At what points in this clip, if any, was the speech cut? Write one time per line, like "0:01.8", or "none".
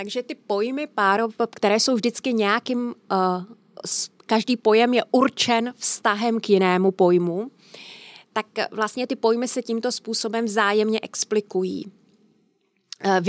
none